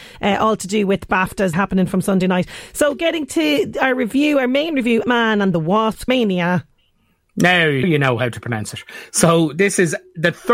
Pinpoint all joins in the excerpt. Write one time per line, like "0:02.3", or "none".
0:01.5
0:05.0
0:06.1
0:07.8